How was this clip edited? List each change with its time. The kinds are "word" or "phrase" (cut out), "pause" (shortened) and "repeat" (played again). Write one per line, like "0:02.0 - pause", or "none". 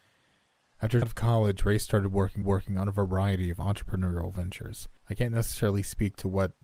0:01.0 - word
0:02.4 - repeat
0:05.0 - pause